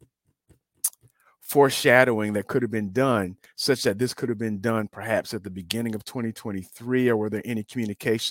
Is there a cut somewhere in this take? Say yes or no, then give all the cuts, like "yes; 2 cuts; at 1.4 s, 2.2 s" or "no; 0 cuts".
no; 0 cuts